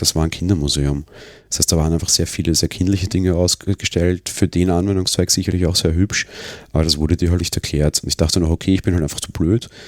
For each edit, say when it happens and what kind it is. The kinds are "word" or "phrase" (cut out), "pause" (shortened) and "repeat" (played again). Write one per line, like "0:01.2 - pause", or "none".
0:07.4 - word